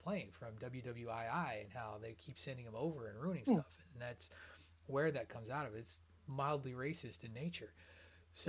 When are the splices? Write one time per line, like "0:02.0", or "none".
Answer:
none